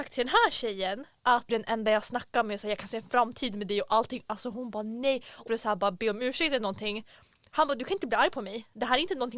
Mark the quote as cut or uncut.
cut